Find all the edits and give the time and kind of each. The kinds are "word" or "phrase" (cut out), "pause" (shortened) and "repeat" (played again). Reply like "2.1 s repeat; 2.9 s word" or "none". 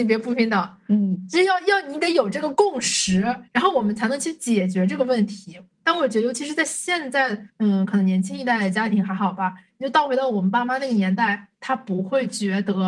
3.5 s pause; 5.7 s pause; 7.5 s pause; 11.5 s pause

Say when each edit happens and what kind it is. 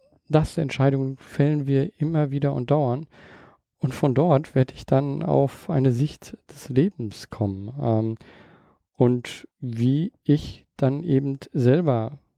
9.5 s pause

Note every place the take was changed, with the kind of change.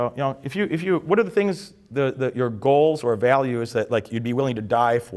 none

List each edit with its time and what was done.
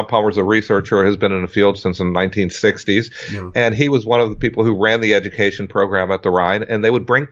none

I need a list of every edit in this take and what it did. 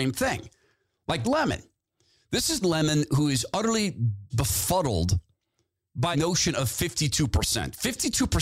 1.2 s word; 2.6 s word; 4.3 s word; 6.1 s word

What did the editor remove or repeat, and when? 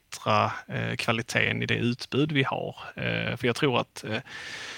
none

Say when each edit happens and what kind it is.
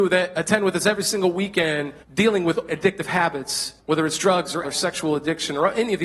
2.0 s pause; 2.7 s word; 3.8 s pause; 4.6 s word

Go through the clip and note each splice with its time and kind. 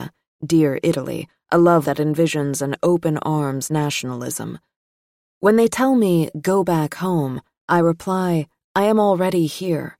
1.8 s word

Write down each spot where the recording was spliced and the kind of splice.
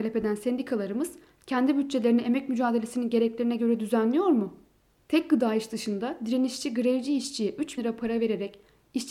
7.8 s word

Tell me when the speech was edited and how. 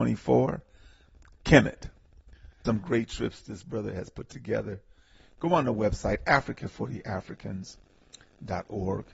2.6 s word

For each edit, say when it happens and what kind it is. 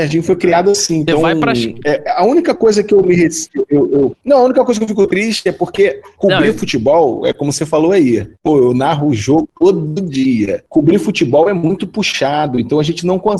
none

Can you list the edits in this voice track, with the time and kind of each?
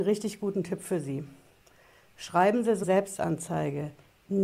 2.8 s word

